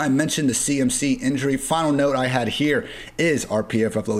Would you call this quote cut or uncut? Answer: uncut